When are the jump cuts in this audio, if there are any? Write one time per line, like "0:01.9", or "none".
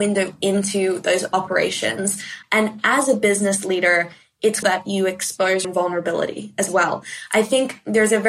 0:04.6
0:05.6